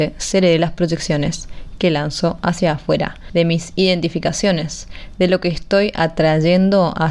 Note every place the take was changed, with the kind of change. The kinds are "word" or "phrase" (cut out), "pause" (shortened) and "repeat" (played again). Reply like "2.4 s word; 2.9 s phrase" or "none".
none